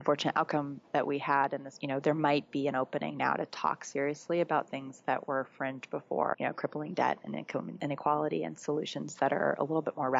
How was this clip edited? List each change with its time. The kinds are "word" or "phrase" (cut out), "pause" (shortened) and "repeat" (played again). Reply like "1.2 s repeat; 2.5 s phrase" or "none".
1.8 s phrase; 6.3 s word

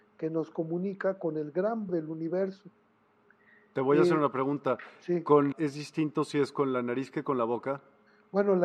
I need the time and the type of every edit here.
1.9 s word; 5.5 s word

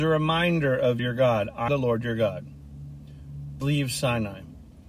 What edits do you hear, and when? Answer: 1.0 s phrase; 1.7 s word; 3.6 s word

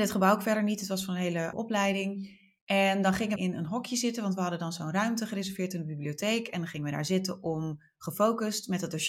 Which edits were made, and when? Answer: 1.5 s word; 3.4 s word

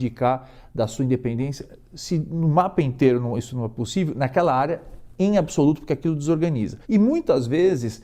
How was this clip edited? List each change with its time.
6.8 s pause

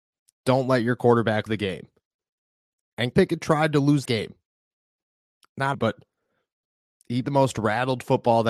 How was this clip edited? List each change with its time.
1.5 s word; 3.1 s word; 4.1 s word; 5.7 s word; 7.2 s word

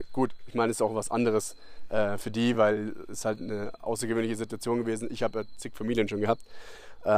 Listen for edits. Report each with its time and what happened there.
none

